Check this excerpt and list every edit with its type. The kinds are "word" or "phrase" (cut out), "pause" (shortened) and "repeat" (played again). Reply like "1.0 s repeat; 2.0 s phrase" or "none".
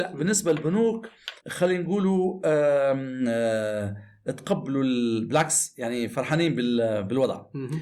1.4 s pause